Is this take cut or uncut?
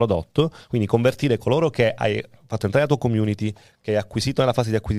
uncut